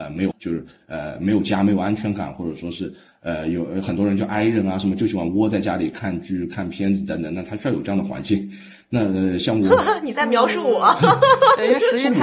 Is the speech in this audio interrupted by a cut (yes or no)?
no